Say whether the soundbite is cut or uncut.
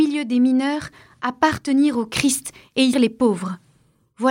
cut